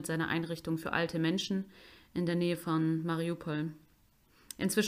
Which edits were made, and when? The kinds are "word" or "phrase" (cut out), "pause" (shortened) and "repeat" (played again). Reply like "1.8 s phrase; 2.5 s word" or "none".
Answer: none